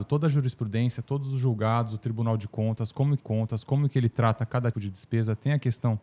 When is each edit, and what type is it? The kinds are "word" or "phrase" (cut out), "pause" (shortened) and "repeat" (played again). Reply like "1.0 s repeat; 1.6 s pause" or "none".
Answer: 3.2 s repeat; 4.7 s word